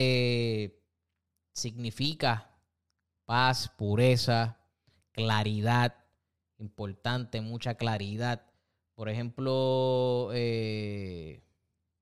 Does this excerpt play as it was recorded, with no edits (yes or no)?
yes